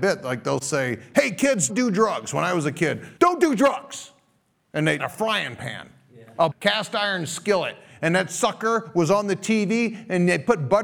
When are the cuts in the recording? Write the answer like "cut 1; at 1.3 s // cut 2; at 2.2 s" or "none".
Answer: cut 1; at 1.7 s // cut 2; at 3.2 s // cut 3; at 5.0 s // cut 4; at 6.5 s